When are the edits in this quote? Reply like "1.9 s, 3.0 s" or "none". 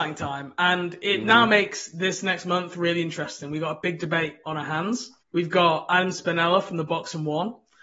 5.2 s